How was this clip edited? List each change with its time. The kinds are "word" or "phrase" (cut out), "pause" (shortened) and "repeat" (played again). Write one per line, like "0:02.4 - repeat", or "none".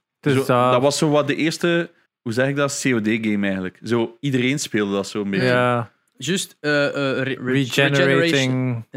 0:02.1 - pause
0:07.4 - word